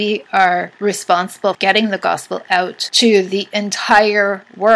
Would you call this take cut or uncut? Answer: cut